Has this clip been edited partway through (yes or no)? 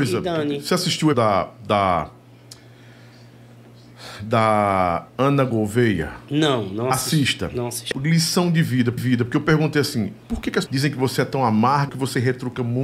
yes